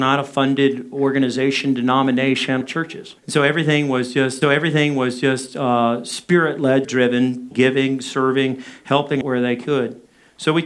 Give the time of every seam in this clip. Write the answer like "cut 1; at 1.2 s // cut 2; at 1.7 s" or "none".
cut 1; at 2.6 s // cut 2; at 3.2 s // cut 3; at 4.4 s // cut 4; at 6.8 s // cut 5; at 7.5 s // cut 6; at 9.2 s